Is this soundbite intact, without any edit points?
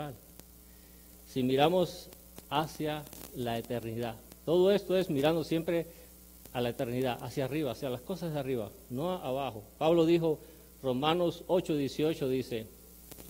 yes; 0 cuts

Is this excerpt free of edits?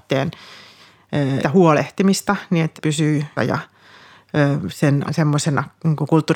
no; 4 cuts; at 1.4 s, 2.8 s, 3.4 s, 5.1 s

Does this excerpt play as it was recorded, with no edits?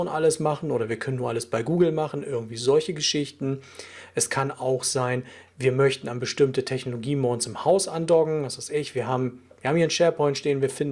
yes; 0 cuts

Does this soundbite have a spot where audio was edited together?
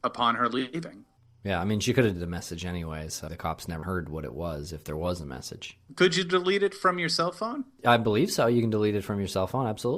yes; 3 cuts; at 2.2 s, 3.3 s, 3.8 s

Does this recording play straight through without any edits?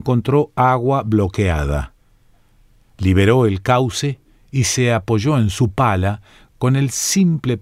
no; 1 cut; at 4.2 s

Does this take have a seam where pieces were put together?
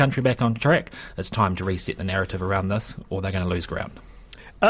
no; 0 cuts

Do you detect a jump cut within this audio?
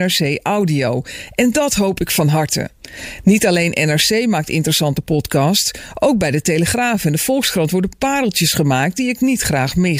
no; 0 cuts

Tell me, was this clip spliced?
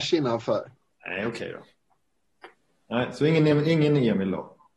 no; 0 cuts

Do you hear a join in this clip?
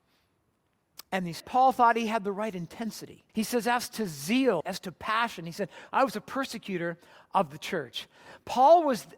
yes; 3 cuts; at 1.4 s, 3.3 s, 4.6 s

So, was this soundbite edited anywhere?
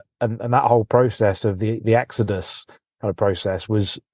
no; 0 cuts

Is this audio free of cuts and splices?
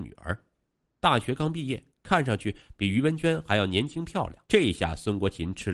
no; 2 cuts; at 1.9 s, 4.5 s

